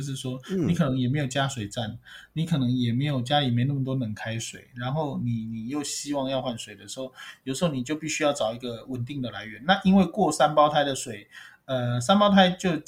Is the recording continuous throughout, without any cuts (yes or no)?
yes